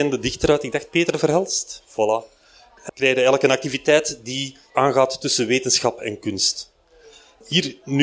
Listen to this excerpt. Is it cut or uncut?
cut